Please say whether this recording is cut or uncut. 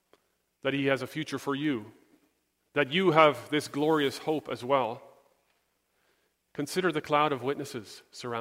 uncut